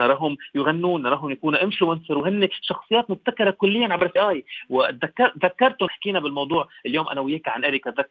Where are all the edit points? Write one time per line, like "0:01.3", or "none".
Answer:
0:04.2
0:05.9